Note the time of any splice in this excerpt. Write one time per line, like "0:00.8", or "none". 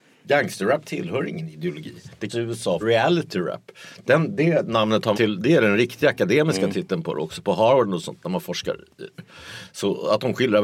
0:02.3
0:02.8
0:05.1